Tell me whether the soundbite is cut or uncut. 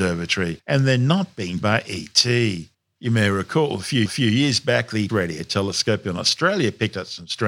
cut